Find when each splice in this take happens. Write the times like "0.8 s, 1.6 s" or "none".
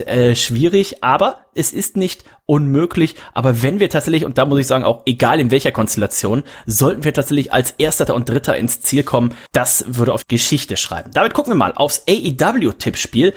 8.1 s, 9.5 s, 10.2 s